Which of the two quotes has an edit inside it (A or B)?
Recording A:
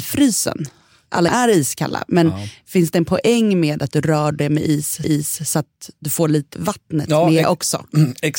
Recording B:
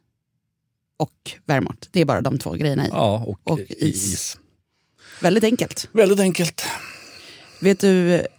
A